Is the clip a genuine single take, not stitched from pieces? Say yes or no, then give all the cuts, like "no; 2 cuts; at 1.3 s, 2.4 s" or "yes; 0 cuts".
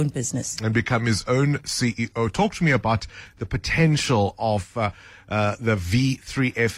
yes; 0 cuts